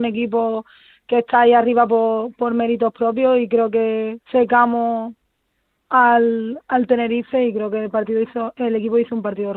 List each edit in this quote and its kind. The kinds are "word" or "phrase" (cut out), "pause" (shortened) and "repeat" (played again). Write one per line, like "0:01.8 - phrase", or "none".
0:04.2 - pause

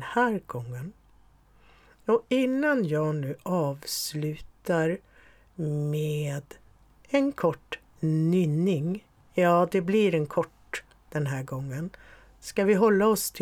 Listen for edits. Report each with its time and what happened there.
none

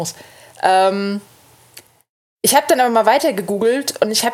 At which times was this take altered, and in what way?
none

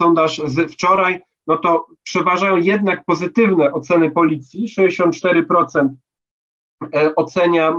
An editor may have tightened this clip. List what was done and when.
none

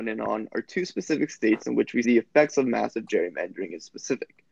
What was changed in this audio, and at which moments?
0:02.0 - word

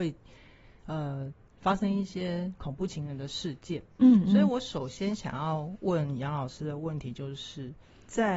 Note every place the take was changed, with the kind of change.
none

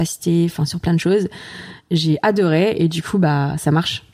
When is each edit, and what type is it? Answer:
none

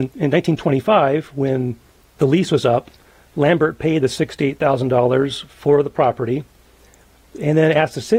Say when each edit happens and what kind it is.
none

